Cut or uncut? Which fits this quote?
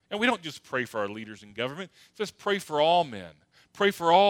uncut